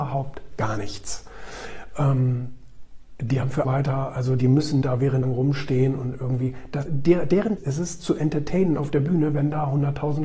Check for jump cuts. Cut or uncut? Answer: cut